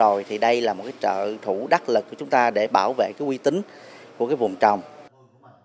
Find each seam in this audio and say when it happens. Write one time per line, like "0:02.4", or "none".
none

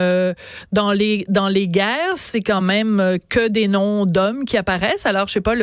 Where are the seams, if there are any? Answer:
none

